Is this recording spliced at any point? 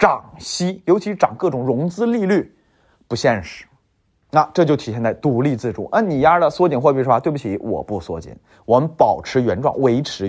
no; 0 cuts

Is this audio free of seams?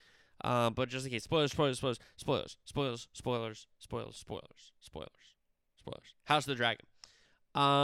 yes; 0 cuts

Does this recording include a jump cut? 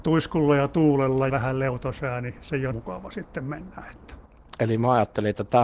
yes; 2 cuts; at 1.3 s, 2.7 s

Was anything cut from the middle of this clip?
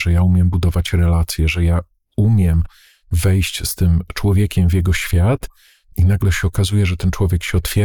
no; 0 cuts

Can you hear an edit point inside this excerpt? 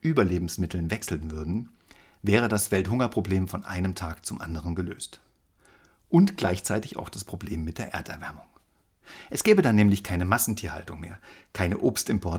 no; 0 cuts

